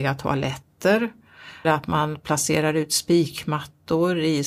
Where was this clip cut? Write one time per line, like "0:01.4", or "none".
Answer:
0:01.6